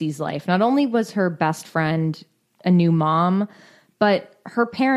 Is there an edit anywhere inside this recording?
no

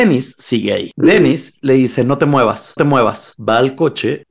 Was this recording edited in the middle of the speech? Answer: yes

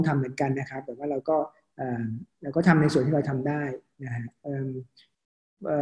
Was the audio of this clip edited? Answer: no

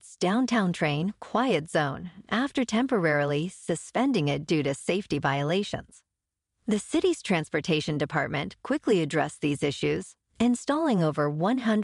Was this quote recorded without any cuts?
yes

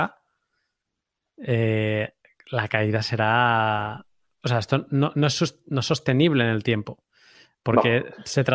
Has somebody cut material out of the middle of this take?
no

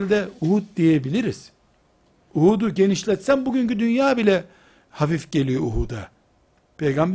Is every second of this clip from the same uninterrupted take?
yes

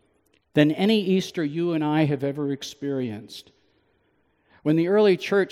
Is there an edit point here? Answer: no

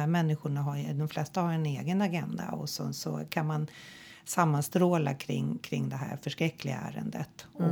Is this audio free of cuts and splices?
yes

